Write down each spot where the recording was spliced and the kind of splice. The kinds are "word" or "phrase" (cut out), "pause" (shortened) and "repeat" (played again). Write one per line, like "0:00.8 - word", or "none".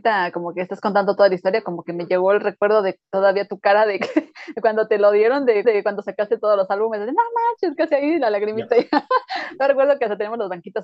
0:05.6 - repeat
0:07.8 - word